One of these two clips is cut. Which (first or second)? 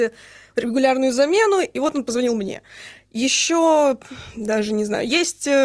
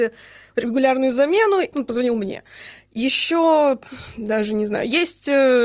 second